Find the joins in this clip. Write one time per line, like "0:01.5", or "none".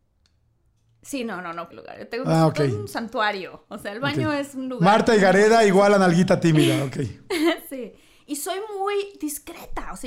0:01.7